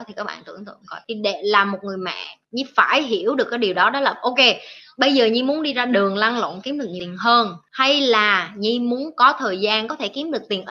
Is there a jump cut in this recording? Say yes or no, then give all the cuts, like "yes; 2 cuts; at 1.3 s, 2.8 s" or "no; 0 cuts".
no; 0 cuts